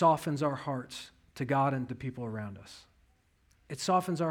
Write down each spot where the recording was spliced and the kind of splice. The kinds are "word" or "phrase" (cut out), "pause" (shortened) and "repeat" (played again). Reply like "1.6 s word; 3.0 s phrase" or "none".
1.9 s word